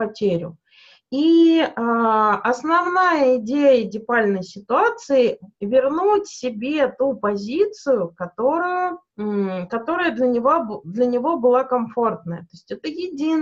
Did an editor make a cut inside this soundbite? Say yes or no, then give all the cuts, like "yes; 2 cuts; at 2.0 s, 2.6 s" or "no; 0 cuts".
yes; 2 cuts; at 5.5 s, 9.1 s